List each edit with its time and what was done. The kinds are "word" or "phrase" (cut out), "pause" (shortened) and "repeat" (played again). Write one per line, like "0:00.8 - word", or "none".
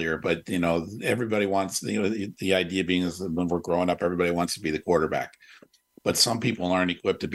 none